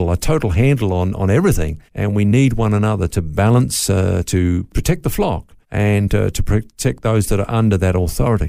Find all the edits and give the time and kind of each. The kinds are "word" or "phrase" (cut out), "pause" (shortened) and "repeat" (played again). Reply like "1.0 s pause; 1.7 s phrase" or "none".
1.9 s pause; 5.6 s pause